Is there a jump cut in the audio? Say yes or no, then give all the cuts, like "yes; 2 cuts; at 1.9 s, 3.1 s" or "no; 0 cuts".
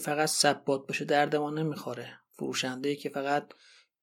no; 0 cuts